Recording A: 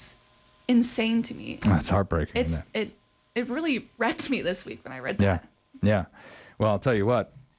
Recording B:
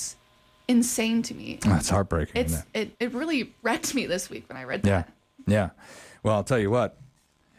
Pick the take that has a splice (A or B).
B